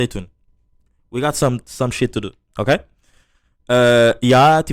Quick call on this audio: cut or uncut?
uncut